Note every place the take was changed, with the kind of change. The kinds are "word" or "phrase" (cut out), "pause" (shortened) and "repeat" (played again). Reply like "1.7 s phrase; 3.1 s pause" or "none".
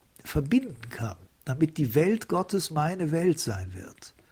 none